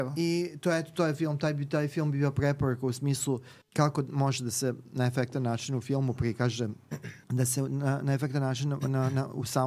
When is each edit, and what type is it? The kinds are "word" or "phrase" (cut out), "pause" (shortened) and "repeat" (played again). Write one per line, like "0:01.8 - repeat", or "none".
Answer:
0:03.6 - pause
0:07.2 - pause